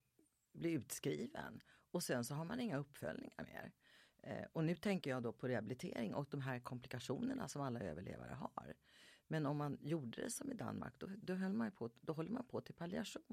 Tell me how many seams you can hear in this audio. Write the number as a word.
zero